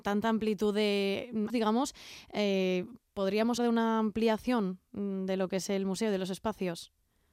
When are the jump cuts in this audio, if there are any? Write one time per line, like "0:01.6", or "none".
0:01.5
0:03.6

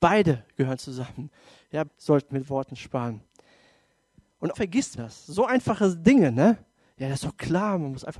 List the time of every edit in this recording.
0:01.9
0:02.3
0:04.5
0:05.0

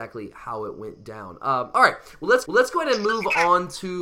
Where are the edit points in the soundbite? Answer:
0:02.4

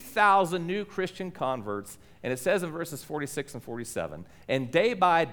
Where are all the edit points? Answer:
none

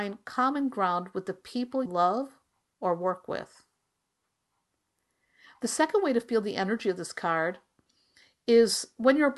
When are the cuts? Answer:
0:01.9

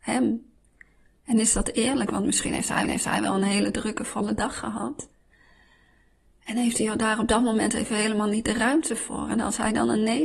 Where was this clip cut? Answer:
0:02.8

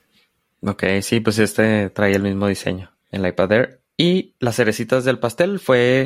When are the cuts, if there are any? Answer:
0:03.0
0:04.4

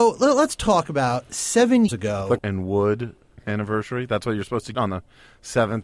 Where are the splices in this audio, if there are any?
0:01.9
0:02.4
0:04.7

